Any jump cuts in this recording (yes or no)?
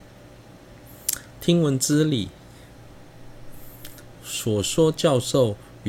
yes